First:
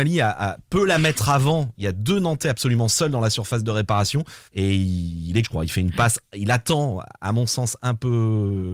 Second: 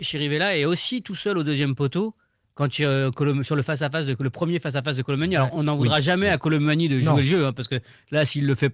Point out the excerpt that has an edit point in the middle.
first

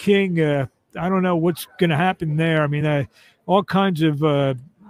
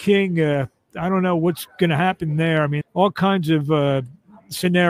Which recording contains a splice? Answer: second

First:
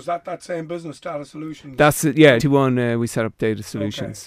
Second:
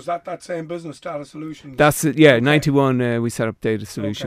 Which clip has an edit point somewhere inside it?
first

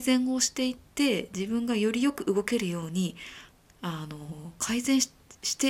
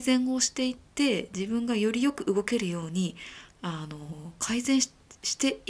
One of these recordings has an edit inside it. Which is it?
second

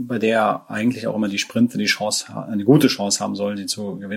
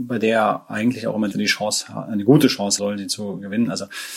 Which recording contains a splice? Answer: second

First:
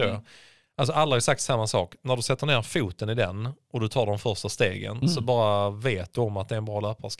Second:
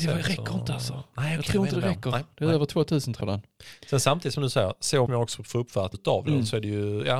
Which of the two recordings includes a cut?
second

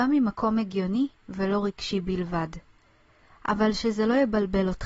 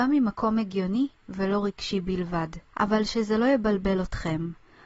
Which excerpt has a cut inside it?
second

